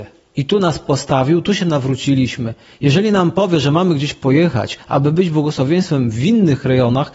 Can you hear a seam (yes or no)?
no